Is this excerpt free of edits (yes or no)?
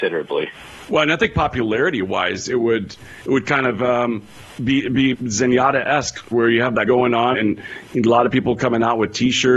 no